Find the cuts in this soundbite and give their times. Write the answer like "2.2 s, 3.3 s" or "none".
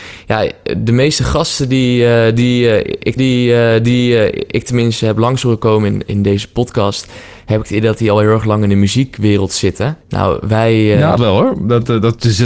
3.2 s, 10.0 s, 11.2 s